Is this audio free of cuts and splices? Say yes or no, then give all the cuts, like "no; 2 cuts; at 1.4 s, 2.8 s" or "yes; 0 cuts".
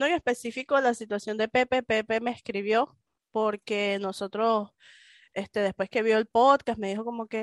yes; 0 cuts